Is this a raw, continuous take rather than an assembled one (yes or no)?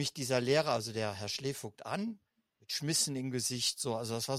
yes